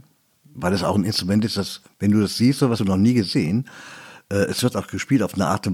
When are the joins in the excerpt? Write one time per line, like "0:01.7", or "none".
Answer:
0:02.8

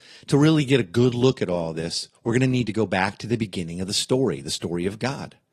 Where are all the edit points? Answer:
none

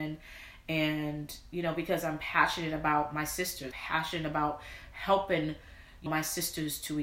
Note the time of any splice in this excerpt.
0:03.7
0:06.1

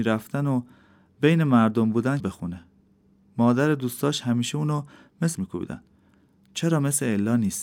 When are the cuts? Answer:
0:02.2
0:05.3

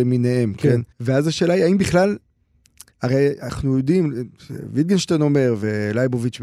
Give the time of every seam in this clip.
0:00.9
0:02.9

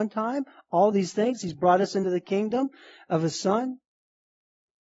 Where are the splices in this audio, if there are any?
none

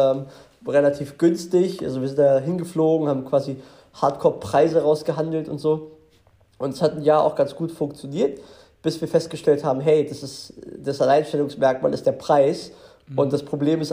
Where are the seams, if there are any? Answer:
none

